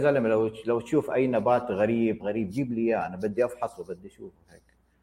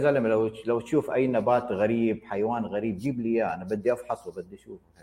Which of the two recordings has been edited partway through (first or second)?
first